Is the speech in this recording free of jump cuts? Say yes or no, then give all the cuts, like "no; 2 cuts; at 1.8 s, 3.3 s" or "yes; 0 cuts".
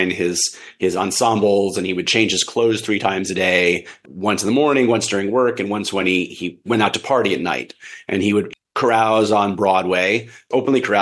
yes; 0 cuts